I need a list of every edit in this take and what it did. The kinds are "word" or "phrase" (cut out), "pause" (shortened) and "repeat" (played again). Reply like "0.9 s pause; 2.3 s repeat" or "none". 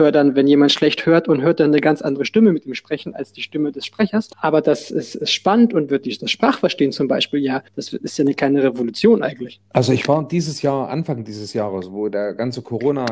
4.3 s pause; 7.7 s pause

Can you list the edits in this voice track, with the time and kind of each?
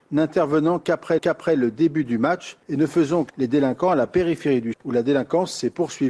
1.2 s repeat; 2.6 s pause; 3.3 s word; 4.7 s word

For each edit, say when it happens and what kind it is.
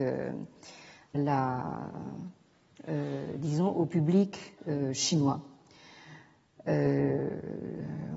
1.1 s word

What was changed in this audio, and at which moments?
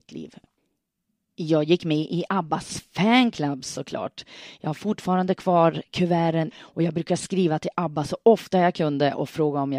6.5 s phrase

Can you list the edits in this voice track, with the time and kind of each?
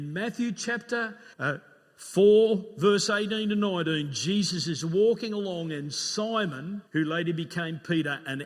1.3 s pause; 6.9 s pause

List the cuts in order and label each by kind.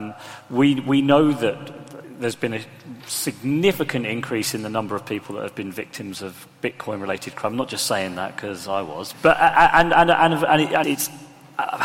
9.1 s word; 10.8 s word

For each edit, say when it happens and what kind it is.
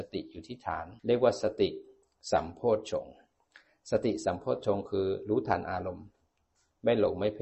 1.0 s pause

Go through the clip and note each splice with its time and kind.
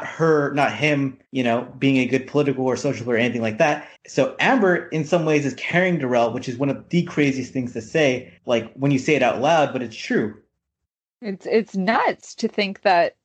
1.3 s pause; 4.0 s pause; 8.4 s pause

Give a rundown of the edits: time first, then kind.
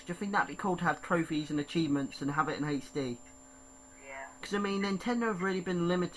4.4 s pause

